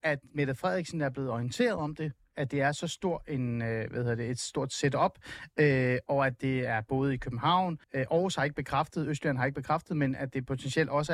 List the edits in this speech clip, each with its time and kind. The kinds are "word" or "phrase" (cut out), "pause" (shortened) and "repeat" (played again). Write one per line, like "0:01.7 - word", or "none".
0:07.8 - pause